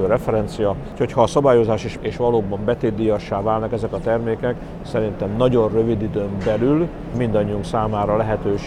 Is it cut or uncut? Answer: cut